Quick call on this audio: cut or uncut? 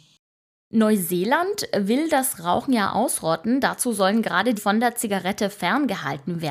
cut